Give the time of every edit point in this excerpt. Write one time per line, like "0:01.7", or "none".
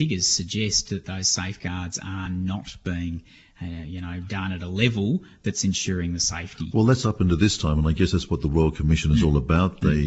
none